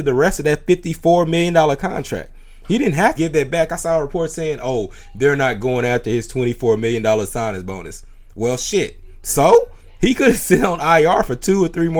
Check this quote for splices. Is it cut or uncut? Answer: cut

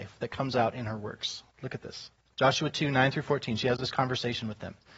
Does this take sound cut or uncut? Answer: uncut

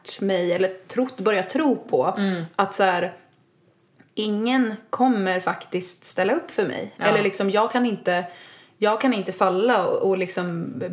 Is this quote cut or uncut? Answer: uncut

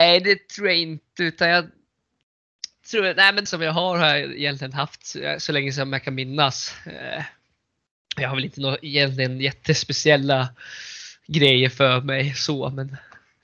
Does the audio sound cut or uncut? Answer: cut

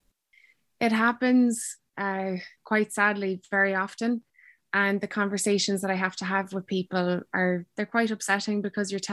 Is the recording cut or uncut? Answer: uncut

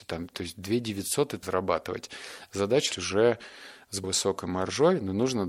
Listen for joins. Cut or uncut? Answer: cut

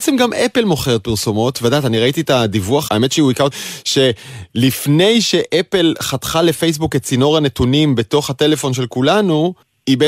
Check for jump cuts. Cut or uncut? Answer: cut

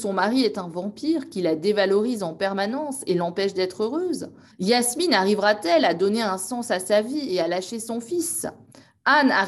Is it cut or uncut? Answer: cut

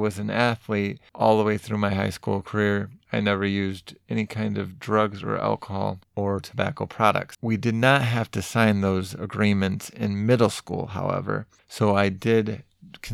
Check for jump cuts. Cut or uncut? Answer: uncut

